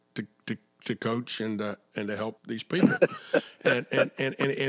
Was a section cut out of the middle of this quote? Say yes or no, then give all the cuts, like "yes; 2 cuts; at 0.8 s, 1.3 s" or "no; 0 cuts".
yes; 1 cut; at 2.4 s